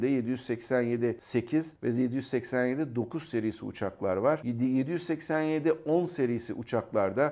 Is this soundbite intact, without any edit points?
yes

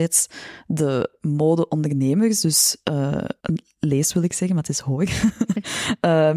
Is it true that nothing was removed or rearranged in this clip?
no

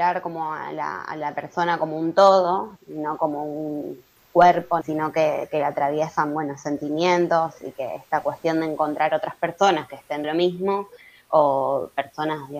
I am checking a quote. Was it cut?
yes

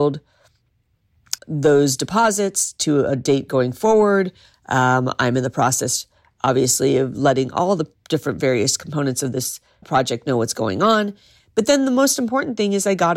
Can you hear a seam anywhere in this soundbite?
yes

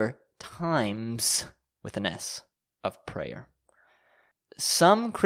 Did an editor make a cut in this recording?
no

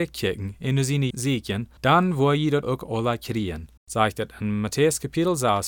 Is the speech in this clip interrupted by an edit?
yes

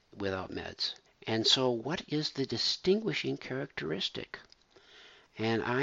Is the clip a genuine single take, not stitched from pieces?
no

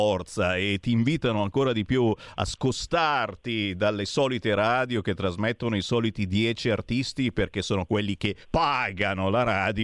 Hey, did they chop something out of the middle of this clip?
yes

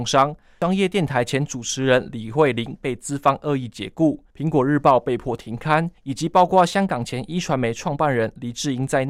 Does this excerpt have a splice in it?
yes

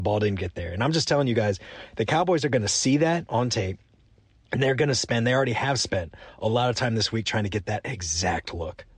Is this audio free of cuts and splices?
yes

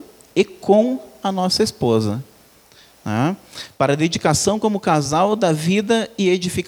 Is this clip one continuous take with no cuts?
yes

